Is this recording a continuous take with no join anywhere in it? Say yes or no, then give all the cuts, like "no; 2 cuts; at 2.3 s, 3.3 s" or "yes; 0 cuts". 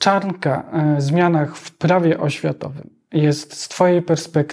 yes; 0 cuts